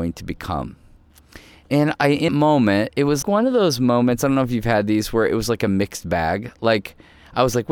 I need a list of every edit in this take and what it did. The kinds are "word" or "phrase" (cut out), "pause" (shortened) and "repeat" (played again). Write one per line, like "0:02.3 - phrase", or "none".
0:02.0 - word
0:02.3 - word
0:03.2 - word